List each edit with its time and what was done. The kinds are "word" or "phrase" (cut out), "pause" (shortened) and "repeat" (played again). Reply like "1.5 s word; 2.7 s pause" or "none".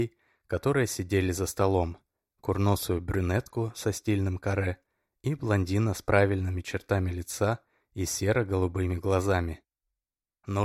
none